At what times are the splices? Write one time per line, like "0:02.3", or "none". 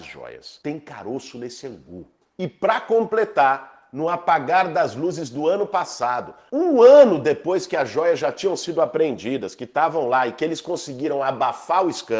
none